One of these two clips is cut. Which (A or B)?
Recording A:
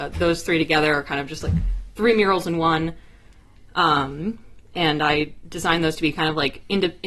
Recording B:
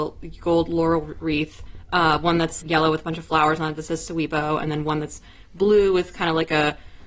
B